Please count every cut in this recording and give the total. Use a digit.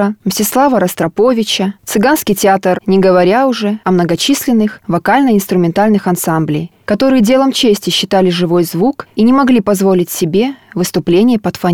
1